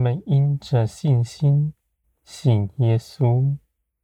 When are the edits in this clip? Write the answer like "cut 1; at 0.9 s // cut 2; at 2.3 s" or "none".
cut 1; at 2.0 s